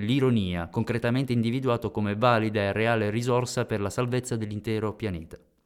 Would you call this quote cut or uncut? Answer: uncut